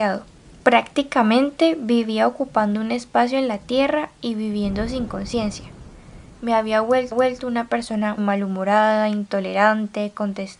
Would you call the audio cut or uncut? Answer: cut